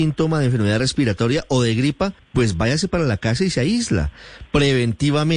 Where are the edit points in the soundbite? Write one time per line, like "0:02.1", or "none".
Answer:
0:02.2

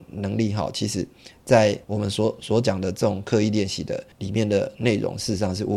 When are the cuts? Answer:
0:01.8
0:04.1

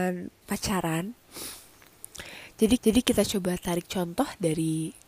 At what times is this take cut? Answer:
0:02.8

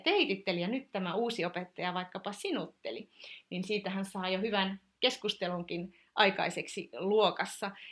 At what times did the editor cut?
none

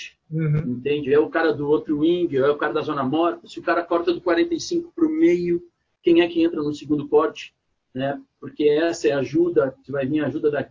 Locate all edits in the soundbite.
none

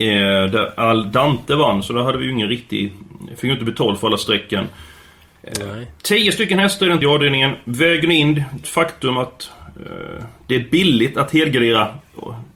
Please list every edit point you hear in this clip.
0:07.0
0:08.6

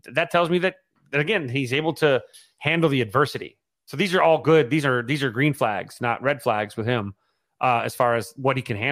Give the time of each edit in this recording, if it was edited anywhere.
none

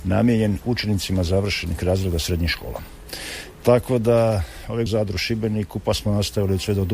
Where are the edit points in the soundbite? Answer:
0:04.9

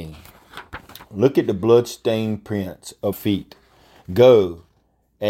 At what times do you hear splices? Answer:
0:03.1

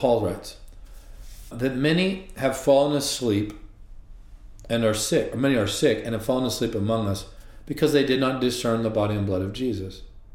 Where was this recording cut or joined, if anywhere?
0:01.5

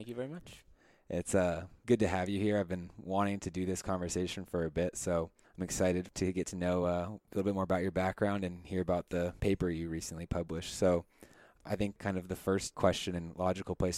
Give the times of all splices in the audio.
none

